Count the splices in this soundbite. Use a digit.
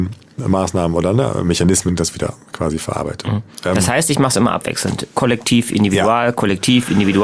1